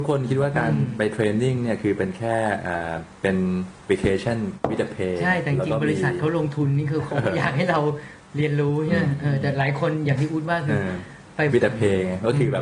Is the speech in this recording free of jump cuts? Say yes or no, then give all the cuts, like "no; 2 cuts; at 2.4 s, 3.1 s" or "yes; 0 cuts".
no; 3 cuts; at 3.2 s, 3.8 s, 11.5 s